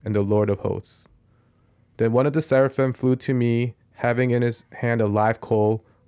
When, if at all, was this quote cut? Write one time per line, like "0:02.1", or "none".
none